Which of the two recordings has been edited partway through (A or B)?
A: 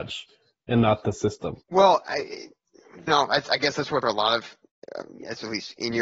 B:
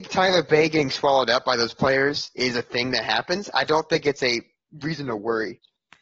A